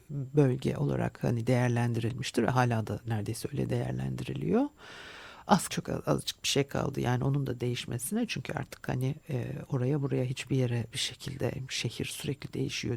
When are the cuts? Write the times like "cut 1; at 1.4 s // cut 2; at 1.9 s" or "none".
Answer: cut 1; at 5.7 s // cut 2; at 10.9 s